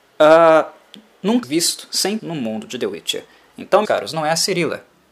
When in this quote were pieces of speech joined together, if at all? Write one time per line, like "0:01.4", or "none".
0:01.4
0:02.2
0:03.8